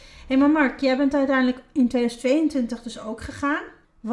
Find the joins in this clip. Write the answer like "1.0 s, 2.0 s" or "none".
none